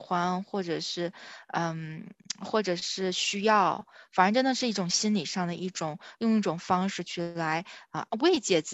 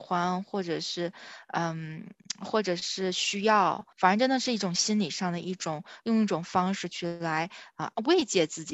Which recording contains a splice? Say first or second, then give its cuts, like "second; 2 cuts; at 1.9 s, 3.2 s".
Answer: second; 1 cut; at 3.9 s